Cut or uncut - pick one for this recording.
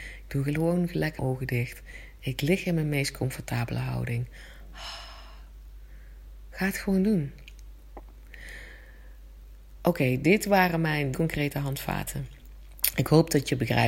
cut